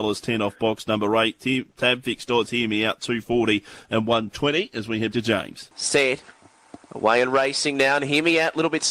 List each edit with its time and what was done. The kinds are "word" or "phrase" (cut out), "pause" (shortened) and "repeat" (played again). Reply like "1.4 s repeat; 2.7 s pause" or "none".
5.1 s word; 6.8 s pause

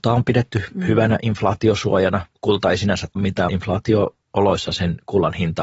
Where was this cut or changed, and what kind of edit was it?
3.2 s word; 3.5 s word

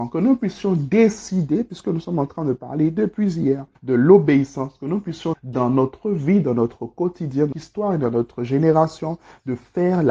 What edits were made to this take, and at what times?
3.7 s pause; 5.3 s word; 7.5 s word

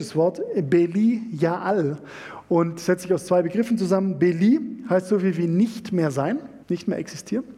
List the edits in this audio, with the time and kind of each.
6.6 s pause

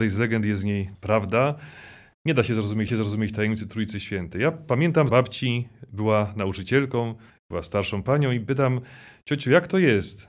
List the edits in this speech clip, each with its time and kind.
0.9 s word; 2.9 s repeat; 5.1 s phrase; 7.3 s pause

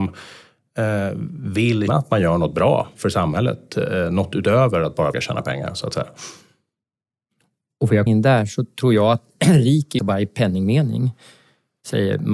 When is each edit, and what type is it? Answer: 1.9 s word; 5.1 s word; 8.1 s word; 10.0 s word

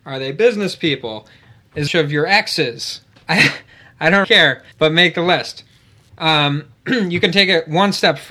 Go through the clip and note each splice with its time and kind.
1.9 s phrase; 4.2 s word; 4.7 s pause

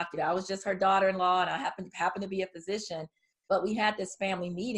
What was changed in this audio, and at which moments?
none

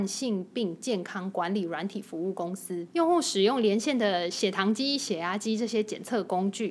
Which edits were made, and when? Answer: 2.9 s pause

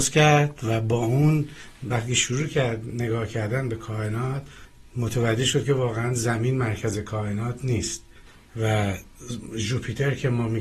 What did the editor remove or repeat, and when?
none

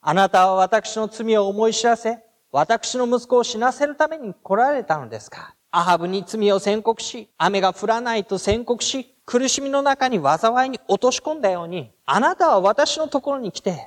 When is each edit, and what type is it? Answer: 5.6 s pause; 7.3 s pause; 9.2 s pause; 12.0 s pause

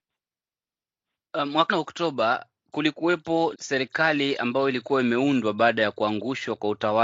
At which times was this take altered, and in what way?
1.7 s phrase; 3.5 s word

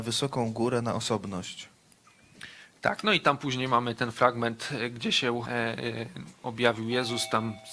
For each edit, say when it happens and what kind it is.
5.4 s word

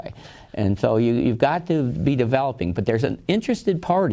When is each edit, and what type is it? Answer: none

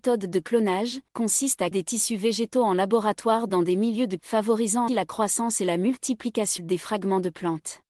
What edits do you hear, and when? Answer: 1.1 s pause; 1.7 s word; 4.2 s phrase; 4.9 s word; 6.6 s word

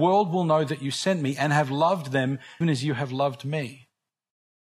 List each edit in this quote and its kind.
2.6 s word

